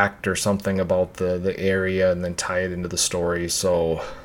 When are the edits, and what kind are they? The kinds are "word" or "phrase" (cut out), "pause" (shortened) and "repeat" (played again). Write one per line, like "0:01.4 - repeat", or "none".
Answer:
none